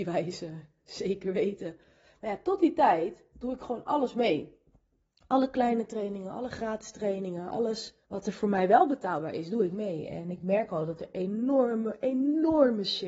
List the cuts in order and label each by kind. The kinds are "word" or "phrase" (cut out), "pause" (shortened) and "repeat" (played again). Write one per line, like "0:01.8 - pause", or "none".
0:08.0 - pause